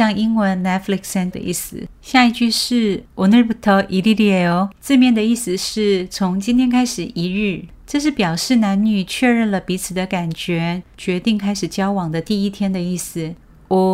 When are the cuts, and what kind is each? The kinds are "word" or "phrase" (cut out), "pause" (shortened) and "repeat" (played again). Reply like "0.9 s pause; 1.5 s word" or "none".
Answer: 1.3 s word; 1.9 s pause; 3.1 s pause; 4.7 s pause

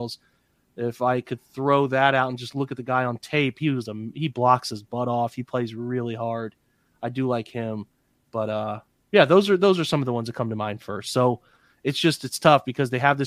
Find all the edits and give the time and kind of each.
none

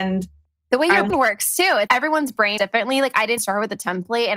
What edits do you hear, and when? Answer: 1.1 s word; 1.9 s word; 2.6 s word; 3.4 s word

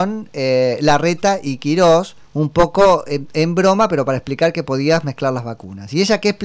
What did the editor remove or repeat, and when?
2.2 s pause

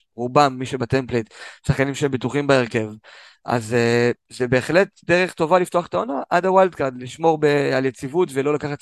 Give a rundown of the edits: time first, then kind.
none

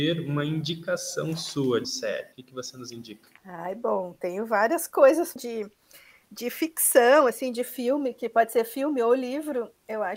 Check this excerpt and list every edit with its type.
1.8 s phrase; 2.3 s pause; 3.4 s pause; 5.4 s phrase

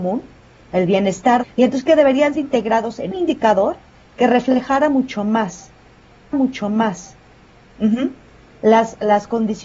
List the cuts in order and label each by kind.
1.4 s phrase; 2.4 s word; 3.1 s word; 6.3 s repeat

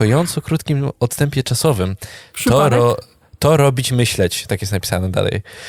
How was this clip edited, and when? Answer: none

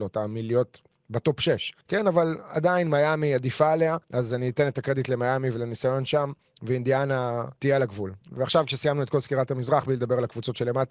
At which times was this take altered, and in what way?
1.8 s pause; 4.0 s pause; 7.6 s pause; 8.2 s pause

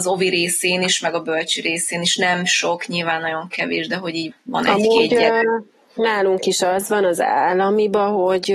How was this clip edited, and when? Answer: 4.3 s word

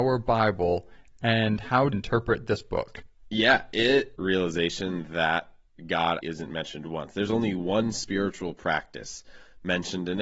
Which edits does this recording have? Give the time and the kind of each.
1.9 s phrase; 4.2 s phrase; 6.2 s word

